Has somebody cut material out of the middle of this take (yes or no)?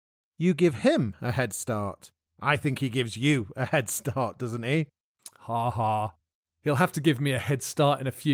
no